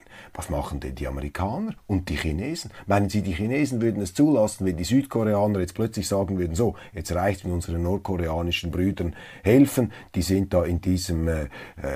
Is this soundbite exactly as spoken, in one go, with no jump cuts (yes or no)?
no